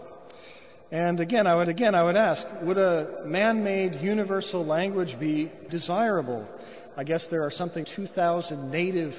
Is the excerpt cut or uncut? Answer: cut